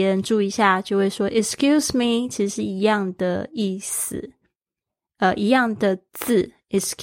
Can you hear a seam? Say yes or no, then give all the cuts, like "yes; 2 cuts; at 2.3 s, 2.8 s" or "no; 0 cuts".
no; 0 cuts